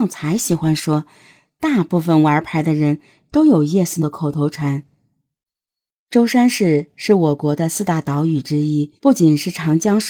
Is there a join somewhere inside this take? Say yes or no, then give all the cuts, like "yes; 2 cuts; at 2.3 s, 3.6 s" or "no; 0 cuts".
yes; 2 cuts; at 4.0 s, 9.0 s